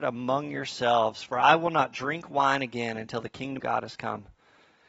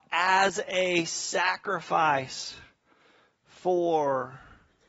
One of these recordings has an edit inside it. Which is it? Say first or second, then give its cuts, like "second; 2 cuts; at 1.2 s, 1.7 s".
first; 1 cut; at 3.6 s